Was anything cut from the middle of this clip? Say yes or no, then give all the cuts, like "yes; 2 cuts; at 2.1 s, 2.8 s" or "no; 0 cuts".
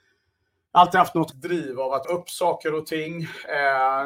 yes; 2 cuts; at 1.3 s, 2.0 s